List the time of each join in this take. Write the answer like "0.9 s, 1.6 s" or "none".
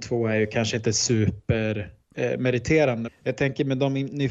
2.0 s, 3.1 s